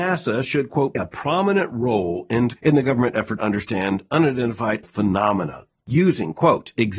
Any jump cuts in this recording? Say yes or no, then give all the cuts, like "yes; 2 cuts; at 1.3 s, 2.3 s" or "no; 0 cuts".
yes; 4 cuts; at 0.9 s, 2.6 s, 3.4 s, 4.8 s